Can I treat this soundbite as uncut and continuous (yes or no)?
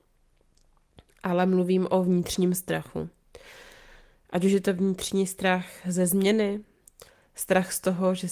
yes